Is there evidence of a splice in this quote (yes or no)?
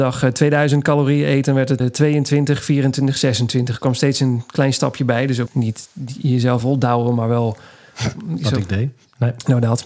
yes